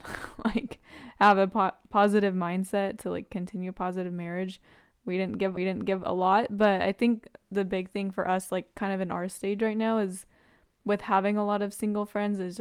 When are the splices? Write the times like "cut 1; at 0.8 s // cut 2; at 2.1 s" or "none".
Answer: cut 1; at 5.6 s